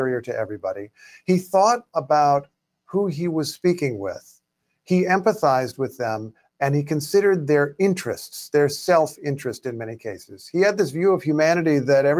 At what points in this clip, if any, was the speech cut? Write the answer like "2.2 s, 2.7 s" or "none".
none